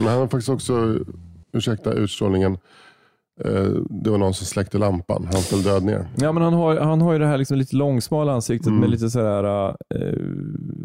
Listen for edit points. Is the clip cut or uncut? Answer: cut